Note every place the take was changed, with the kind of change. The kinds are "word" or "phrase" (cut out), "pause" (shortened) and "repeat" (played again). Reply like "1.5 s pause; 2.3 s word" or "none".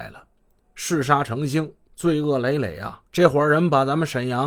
1.9 s pause; 3.1 s pause